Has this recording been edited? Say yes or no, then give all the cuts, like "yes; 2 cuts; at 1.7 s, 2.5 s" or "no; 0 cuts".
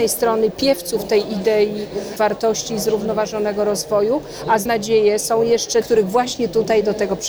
yes; 3 cuts; at 2.2 s, 4.7 s, 5.8 s